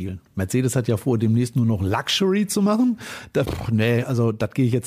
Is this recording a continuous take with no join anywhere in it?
no; 1 cut; at 3.4 s

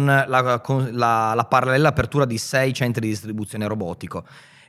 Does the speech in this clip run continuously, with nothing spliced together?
yes; 0 cuts

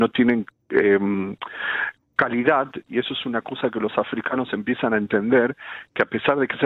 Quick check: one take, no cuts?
yes; 0 cuts

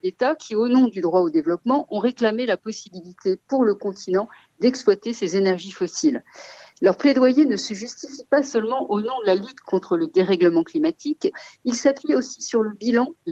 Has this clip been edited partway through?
no; 0 cuts

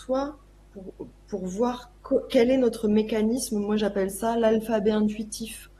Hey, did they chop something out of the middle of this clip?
no; 0 cuts

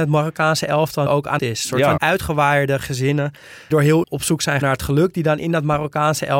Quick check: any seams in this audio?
yes; 6 cuts; at 1.1 s, 1.4 s, 2.0 s, 3.7 s, 4.0 s, 4.6 s

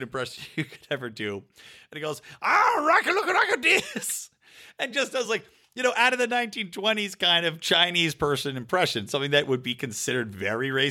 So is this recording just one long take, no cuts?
yes; 0 cuts

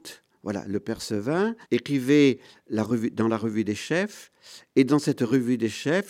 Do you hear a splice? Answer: yes; 1 cut; at 1.6 s

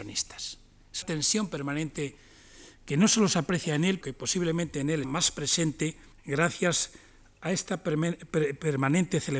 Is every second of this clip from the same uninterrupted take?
no; 4 cuts; at 1.0 s, 4.0 s, 5.0 s, 6.1 s

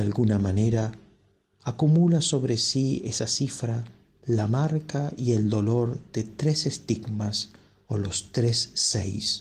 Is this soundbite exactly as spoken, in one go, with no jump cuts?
yes; 0 cuts

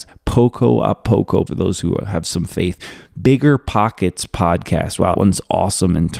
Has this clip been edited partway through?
yes; 2 cuts; at 1.5 s, 5.1 s

